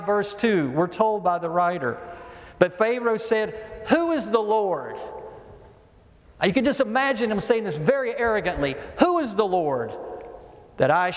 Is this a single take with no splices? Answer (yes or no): yes